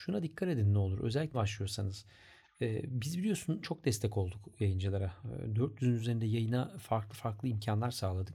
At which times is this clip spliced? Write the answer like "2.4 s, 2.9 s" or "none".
1.3 s, 3.6 s